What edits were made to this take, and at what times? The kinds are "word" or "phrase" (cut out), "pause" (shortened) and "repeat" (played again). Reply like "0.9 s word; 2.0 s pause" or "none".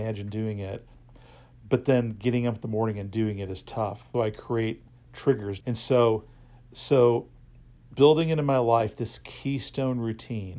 4.1 s word; 5.6 s phrase; 8.0 s word